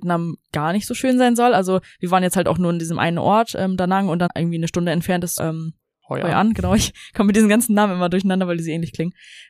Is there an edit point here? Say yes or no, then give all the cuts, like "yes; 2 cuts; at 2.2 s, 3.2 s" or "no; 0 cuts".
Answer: yes; 2 cuts; at 4.3 s, 5.4 s